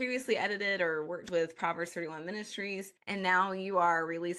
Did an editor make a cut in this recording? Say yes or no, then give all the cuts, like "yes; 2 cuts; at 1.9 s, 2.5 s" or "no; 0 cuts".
yes; 1 cut; at 3.0 s